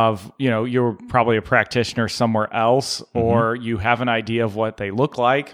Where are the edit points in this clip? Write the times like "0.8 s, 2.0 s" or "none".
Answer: none